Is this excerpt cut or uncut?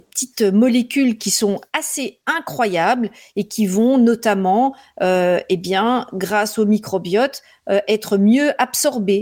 uncut